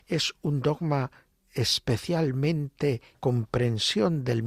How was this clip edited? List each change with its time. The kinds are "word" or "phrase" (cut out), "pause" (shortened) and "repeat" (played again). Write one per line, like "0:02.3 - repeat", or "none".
0:03.1 - phrase

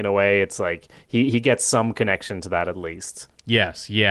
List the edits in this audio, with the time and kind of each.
none

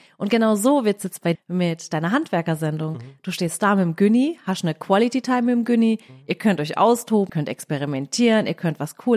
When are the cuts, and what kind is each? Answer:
0:01.3 - word
0:07.3 - word

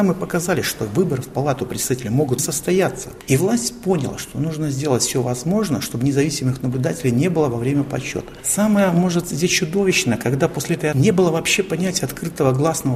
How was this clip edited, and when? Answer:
0:02.4 - word
0:10.9 - word

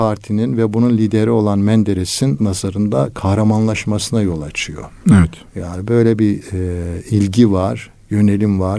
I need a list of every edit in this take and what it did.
0:02.4 - word
0:05.0 - pause

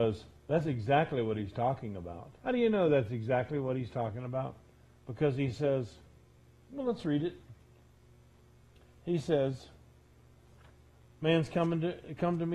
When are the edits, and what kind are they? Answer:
0:02.4 - pause

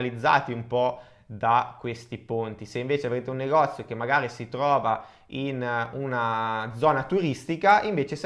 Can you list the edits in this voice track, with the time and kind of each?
none

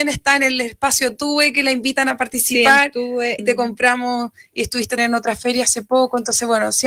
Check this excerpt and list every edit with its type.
0:03.4 - word
0:05.0 - word

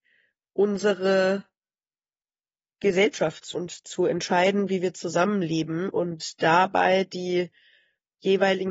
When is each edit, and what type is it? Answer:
0:03.5 - word

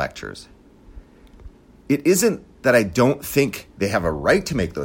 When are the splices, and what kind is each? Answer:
0:01.6 - pause

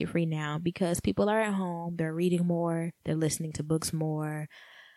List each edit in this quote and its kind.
none

